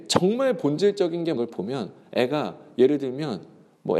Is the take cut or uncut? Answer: cut